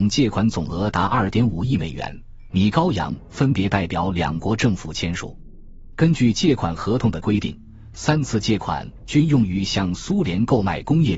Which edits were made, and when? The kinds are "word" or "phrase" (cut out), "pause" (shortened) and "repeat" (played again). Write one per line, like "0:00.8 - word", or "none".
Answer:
0:02.5 - phrase